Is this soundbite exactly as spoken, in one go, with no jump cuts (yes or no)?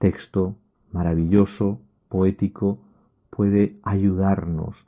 yes